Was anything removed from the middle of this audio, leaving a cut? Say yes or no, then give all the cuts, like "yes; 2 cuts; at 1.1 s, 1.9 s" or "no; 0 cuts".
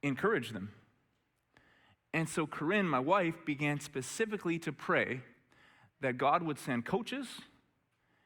no; 0 cuts